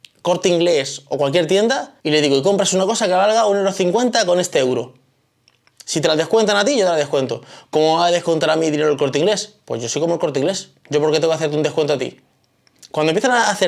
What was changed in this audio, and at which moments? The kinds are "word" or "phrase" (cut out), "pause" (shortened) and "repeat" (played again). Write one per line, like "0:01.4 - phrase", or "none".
0:02.0 - pause